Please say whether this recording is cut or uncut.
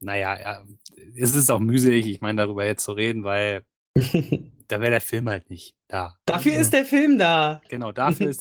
uncut